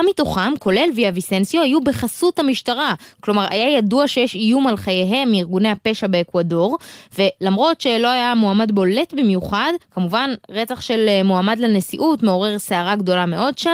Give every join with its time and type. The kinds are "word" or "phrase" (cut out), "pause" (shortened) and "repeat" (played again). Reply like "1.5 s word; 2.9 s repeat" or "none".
9.8 s pause